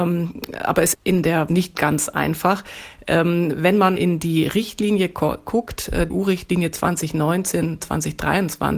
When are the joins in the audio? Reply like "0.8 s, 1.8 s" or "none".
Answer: 0.9 s, 1.5 s, 4.0 s, 6.1 s